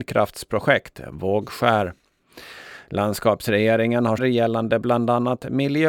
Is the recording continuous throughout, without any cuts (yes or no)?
no